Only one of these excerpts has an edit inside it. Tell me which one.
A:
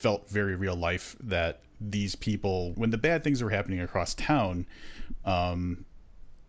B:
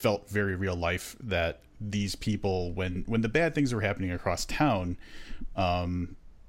A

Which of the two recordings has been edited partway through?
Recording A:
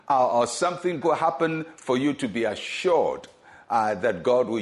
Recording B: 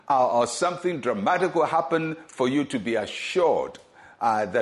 A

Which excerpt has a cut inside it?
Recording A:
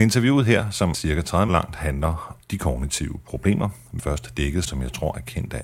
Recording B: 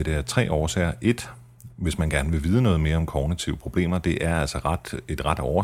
A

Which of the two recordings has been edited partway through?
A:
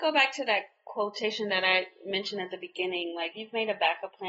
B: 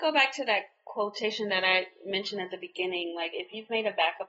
A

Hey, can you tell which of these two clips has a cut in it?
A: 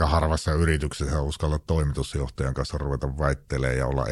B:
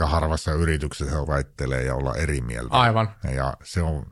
B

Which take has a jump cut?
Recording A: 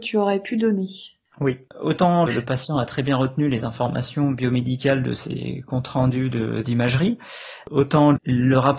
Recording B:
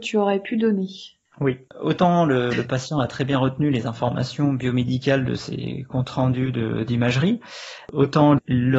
A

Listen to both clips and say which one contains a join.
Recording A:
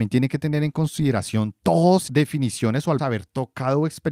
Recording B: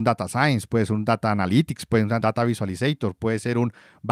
A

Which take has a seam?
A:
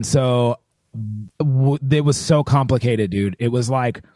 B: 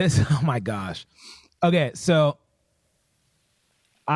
A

